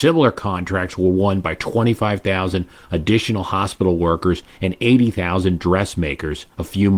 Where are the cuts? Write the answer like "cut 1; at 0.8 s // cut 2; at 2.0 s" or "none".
none